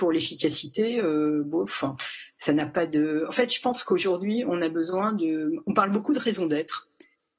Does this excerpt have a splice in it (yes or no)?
no